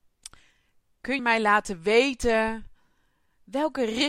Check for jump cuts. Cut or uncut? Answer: cut